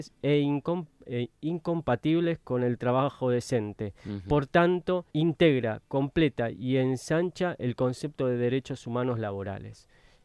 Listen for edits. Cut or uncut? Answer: cut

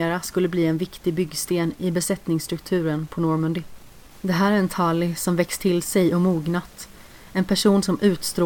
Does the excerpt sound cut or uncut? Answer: uncut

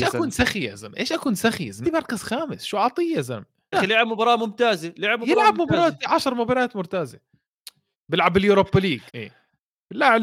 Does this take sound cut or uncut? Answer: cut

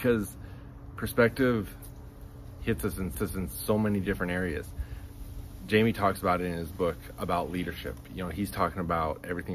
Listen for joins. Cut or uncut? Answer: cut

